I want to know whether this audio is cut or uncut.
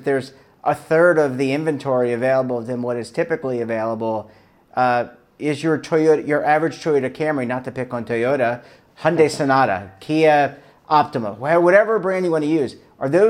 uncut